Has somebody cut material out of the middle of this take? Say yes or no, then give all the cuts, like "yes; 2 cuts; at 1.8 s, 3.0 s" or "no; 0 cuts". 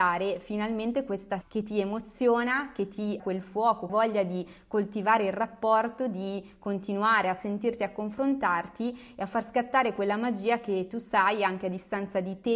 yes; 3 cuts; at 1.4 s, 3.2 s, 3.9 s